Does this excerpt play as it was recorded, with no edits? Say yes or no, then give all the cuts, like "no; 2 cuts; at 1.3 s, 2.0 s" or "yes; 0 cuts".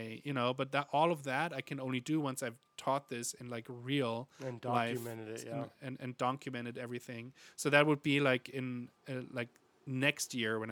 yes; 0 cuts